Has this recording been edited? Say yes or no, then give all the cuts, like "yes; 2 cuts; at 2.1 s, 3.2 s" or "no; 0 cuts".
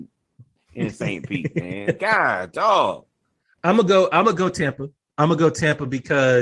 no; 0 cuts